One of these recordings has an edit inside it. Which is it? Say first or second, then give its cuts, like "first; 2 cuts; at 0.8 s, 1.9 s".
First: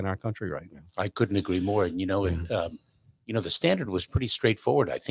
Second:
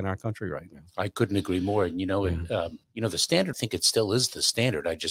second; 2 cuts; at 2.8 s, 3.5 s